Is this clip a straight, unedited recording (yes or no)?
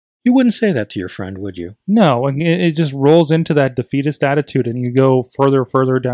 yes